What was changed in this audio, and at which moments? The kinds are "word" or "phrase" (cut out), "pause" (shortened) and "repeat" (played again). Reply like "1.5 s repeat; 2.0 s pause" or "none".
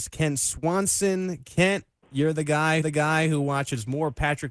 2.0 s pause; 2.8 s repeat